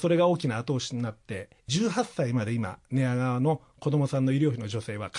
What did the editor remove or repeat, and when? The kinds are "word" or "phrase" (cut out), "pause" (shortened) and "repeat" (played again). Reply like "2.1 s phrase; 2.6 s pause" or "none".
1.6 s pause